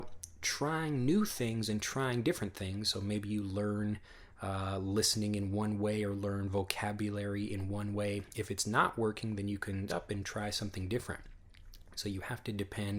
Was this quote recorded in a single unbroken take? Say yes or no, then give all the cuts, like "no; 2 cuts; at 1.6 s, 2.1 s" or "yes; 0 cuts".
no; 1 cut; at 9.9 s